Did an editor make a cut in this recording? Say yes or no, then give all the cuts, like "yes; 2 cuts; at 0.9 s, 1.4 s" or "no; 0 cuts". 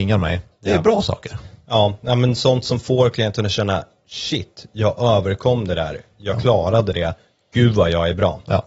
no; 0 cuts